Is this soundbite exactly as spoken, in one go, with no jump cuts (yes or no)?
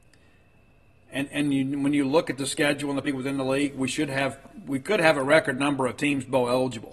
no